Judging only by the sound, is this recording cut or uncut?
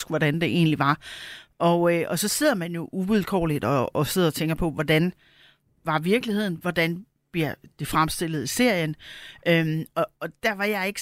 uncut